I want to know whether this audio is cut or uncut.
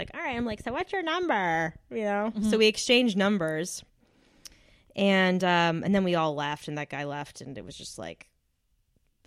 uncut